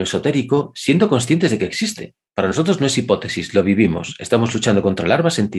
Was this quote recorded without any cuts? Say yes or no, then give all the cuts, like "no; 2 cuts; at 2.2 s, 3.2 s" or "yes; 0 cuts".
yes; 0 cuts